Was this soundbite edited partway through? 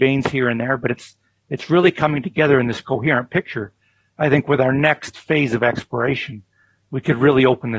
no; 0 cuts

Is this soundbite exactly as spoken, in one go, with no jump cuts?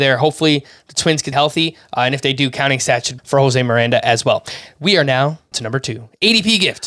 no; 3 cuts; at 1.3 s, 3.2 s, 5.5 s

